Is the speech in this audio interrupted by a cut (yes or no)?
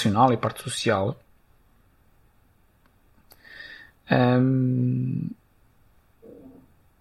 no